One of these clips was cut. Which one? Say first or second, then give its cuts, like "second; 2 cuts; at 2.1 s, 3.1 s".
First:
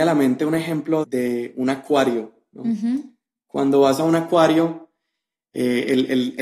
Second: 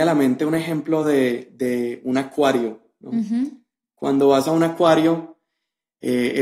first; 1 cut; at 1.0 s